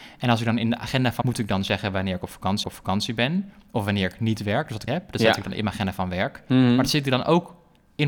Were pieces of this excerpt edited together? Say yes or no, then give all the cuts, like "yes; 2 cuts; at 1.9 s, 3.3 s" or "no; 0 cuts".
yes; 3 cuts; at 1.2 s, 2.6 s, 4.9 s